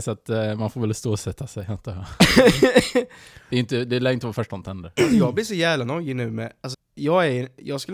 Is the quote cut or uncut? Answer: cut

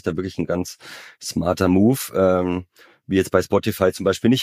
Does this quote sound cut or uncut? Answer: uncut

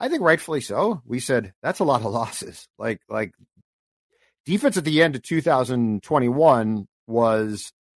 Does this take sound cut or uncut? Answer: uncut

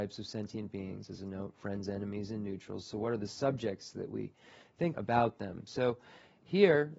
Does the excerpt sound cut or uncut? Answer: cut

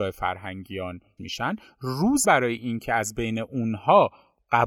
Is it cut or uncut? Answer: cut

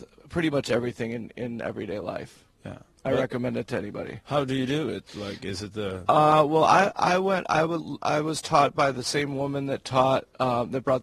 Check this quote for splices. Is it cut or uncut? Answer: uncut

